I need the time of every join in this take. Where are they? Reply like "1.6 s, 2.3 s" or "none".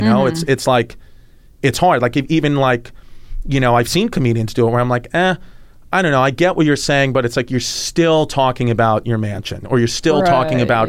none